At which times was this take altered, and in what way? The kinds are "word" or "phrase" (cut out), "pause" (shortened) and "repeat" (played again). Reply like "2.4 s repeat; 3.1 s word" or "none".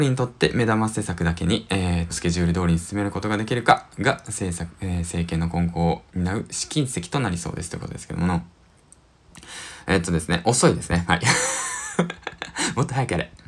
2.1 s phrase; 6.1 s pause